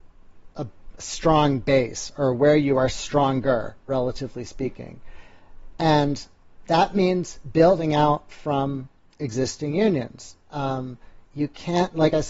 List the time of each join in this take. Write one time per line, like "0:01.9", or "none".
none